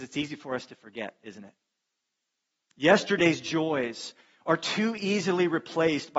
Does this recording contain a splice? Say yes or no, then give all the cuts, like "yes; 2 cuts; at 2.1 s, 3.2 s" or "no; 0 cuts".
no; 0 cuts